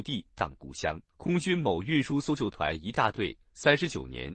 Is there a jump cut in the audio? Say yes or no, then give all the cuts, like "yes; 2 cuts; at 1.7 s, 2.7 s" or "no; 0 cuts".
yes; 1 cut; at 1.1 s